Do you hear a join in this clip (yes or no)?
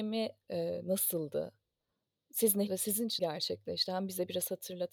yes